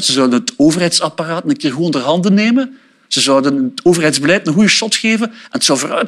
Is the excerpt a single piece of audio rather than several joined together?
yes; 0 cuts

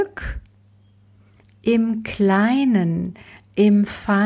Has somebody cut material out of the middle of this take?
no; 0 cuts

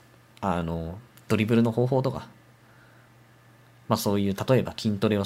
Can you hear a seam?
no; 0 cuts

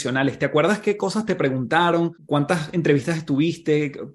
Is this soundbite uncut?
no; 1 cut; at 2.2 s

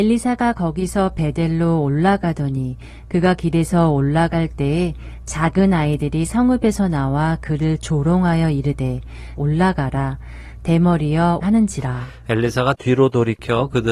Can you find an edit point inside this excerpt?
yes; 2 cuts; at 9.4 s, 11.4 s

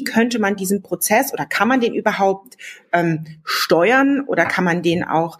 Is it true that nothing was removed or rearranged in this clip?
yes; 0 cuts

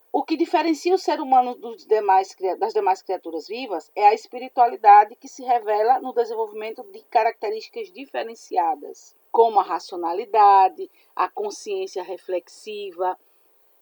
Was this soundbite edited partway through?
yes; 1 cut; at 9.3 s

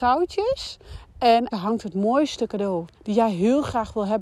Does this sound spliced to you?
yes; 2 cuts; at 1.5 s, 2.9 s

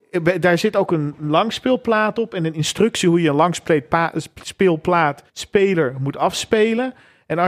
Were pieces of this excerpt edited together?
yes; 1 cut; at 5.3 s

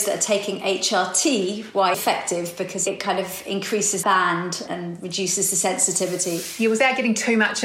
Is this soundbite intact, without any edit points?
no; 2 cuts; at 1.9 s, 4.0 s

